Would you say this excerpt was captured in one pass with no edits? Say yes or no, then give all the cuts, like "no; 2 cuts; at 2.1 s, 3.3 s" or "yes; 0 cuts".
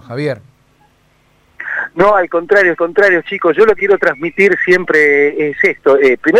no; 2 cuts; at 2.8 s, 3.8 s